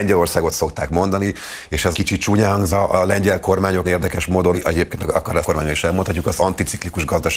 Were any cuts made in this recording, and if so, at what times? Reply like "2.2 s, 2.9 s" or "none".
1.9 s, 2.7 s, 3.8 s, 4.5 s, 5.4 s, 6.4 s